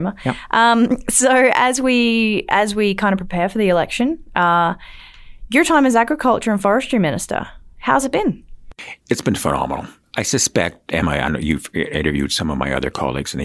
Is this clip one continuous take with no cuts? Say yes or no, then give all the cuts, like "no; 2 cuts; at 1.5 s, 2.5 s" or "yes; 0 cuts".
yes; 0 cuts